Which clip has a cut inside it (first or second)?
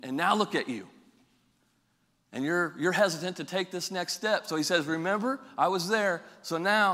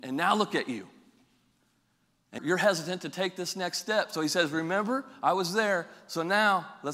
second